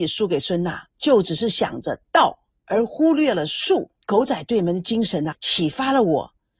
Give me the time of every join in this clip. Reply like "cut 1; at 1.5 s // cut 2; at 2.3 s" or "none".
cut 1; at 0.9 s // cut 2; at 4.0 s // cut 3; at 5.3 s